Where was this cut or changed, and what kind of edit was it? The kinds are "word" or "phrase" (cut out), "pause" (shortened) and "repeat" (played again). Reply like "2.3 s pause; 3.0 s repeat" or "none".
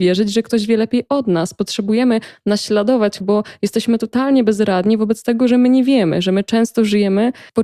3.2 s word

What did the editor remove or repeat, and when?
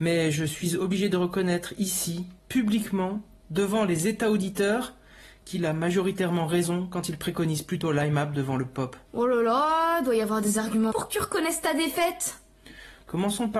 2.4 s pause; 9.1 s pause; 10.9 s phrase

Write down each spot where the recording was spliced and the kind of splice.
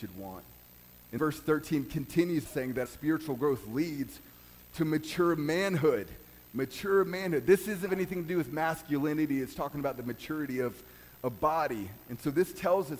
1.2 s word; 2.5 s word; 2.9 s word; 7.9 s word; 9.5 s word

